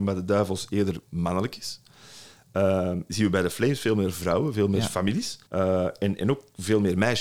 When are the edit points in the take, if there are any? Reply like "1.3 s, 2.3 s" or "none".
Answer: 5.5 s